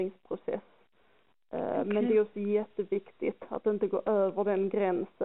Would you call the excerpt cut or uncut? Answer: uncut